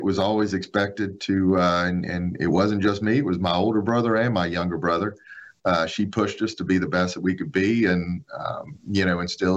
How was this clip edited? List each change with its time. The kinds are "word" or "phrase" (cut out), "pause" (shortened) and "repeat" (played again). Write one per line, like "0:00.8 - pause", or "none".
none